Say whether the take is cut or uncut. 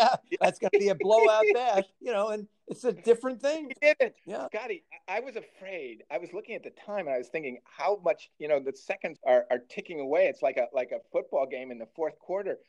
cut